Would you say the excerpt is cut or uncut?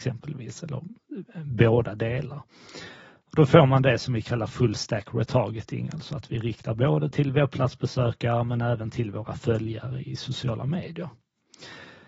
uncut